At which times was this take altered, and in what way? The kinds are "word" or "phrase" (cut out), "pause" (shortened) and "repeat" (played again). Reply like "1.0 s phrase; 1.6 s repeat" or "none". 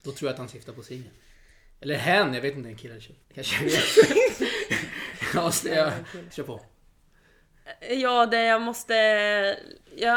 2.6 s word; 3.2 s pause; 6.3 s word

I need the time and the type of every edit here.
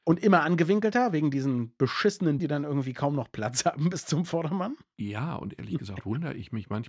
2.4 s word

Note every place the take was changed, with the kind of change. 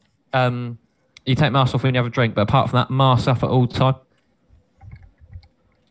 none

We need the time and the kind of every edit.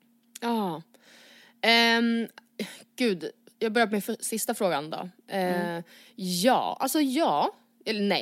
none

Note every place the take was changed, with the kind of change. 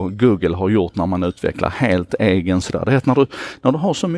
2.6 s phrase

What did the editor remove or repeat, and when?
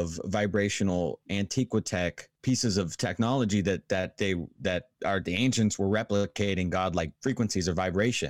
4.9 s pause; 7.1 s pause

